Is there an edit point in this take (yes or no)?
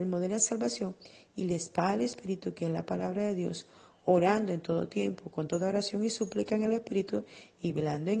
no